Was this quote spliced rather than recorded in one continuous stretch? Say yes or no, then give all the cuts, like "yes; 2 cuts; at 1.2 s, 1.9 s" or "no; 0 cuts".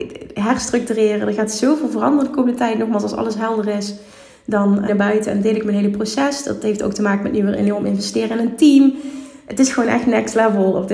yes; 1 cut; at 4.9 s